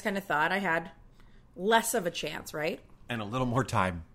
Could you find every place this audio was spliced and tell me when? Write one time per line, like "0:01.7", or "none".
none